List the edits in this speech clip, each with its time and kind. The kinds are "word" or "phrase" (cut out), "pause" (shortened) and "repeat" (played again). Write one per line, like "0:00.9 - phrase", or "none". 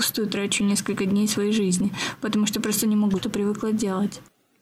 0:03.2 - phrase